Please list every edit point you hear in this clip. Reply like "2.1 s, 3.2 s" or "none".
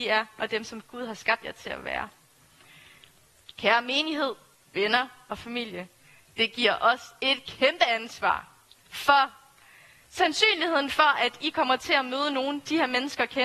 none